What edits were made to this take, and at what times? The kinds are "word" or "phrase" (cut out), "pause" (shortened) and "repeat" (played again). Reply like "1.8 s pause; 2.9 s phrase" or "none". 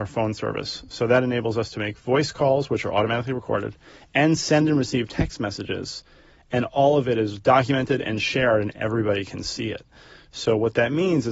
none